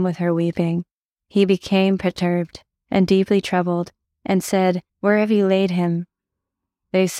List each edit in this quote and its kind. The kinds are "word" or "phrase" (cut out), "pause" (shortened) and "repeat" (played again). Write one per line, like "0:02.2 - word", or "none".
0:04.0 - pause
0:04.9 - pause